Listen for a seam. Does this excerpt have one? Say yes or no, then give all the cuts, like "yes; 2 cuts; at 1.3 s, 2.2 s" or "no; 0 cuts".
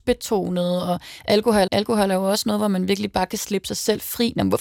yes; 1 cut; at 1.7 s